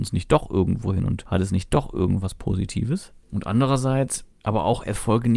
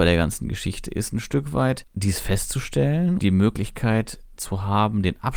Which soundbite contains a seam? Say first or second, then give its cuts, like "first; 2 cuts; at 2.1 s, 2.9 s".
second; 2 cuts; at 1.9 s, 3.2 s